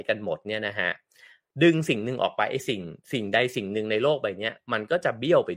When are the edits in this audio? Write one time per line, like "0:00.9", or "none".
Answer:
none